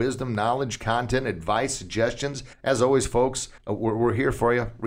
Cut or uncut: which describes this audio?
cut